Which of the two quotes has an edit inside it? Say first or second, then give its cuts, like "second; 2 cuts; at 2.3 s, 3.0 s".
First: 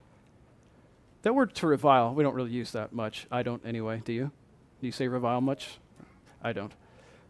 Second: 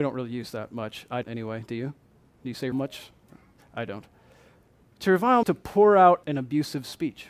second; 4 cuts; at 1.2 s, 2.7 s, 5.4 s, 6.2 s